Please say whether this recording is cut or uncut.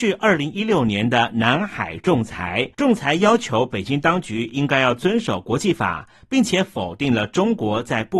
cut